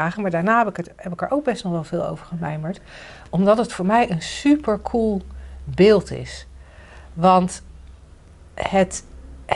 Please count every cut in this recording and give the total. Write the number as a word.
zero